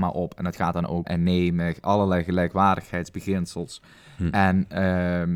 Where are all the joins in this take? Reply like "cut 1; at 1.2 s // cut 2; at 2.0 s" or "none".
cut 1; at 1.0 s